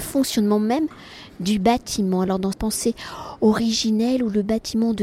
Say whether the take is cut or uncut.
cut